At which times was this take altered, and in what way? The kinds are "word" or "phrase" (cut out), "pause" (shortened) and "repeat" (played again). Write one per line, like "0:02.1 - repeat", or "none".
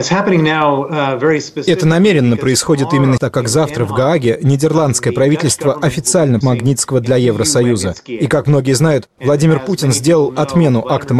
0:03.2 - word
0:06.4 - phrase